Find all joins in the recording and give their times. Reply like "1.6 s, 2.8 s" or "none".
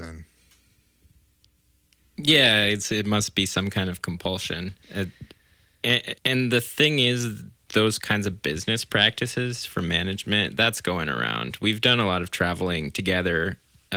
4.8 s, 6.2 s